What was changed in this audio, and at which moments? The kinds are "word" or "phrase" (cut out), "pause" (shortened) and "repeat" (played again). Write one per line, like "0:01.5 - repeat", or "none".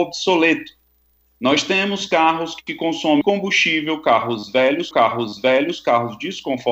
0:03.2 - word
0:04.9 - repeat